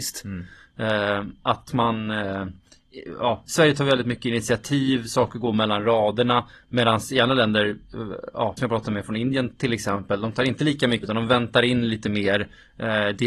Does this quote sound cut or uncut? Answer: cut